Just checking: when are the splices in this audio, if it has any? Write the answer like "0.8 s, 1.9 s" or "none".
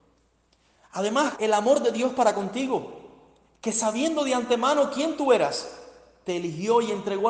1.4 s

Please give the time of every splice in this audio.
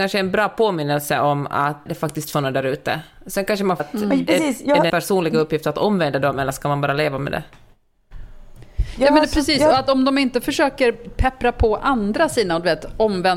1.9 s, 2.3 s, 3.8 s, 4.9 s

